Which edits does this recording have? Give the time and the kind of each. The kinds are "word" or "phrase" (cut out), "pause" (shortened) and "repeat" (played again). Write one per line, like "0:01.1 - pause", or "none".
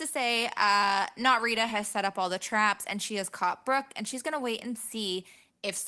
none